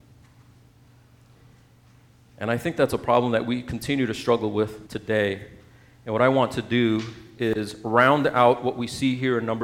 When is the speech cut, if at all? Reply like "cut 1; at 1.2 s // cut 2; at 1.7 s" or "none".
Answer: cut 1; at 4.9 s